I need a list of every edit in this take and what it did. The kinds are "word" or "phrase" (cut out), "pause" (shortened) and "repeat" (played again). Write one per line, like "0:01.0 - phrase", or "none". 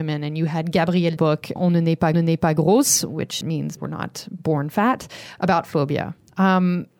0:01.2 - phrase
0:01.6 - word
0:02.1 - repeat
0:03.4 - word
0:03.8 - word
0:05.7 - word